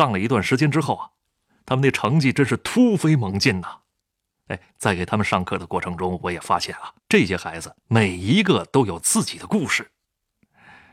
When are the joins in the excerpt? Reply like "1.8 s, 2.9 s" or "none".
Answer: 4.7 s, 7.0 s, 7.8 s